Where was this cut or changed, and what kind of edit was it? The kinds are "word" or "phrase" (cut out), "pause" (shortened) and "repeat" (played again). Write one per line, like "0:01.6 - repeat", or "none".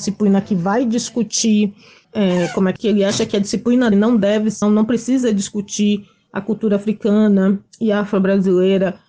0:02.0 - word
0:02.8 - word
0:03.9 - word
0:04.6 - word